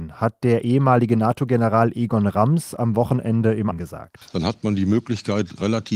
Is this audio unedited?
no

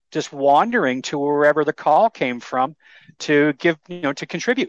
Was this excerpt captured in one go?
yes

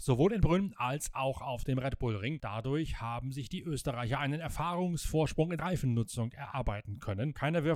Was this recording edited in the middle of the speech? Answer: yes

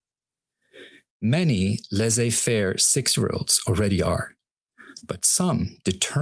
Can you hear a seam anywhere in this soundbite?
no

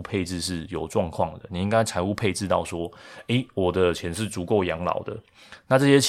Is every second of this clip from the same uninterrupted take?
yes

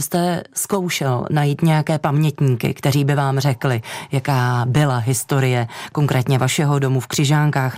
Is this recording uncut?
yes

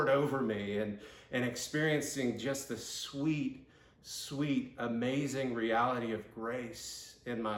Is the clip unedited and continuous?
yes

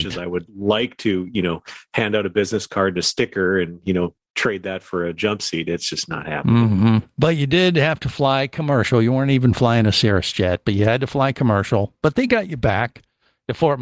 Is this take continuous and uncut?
yes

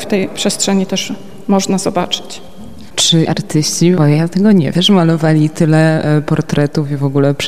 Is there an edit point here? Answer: yes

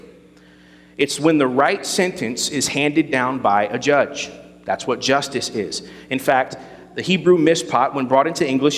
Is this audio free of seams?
yes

